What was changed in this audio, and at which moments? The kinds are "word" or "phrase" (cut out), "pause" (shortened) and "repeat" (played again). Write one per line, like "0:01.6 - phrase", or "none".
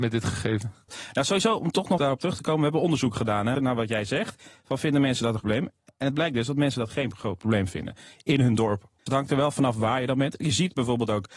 0:02.0 - word
0:03.5 - word
0:05.4 - word
0:09.1 - word